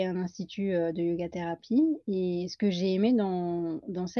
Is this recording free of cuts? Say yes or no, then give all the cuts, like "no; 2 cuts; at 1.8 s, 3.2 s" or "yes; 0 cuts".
yes; 0 cuts